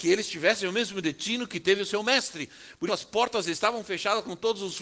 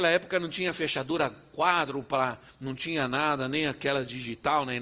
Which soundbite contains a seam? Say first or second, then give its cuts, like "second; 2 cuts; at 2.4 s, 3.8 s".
first; 1 cut; at 2.9 s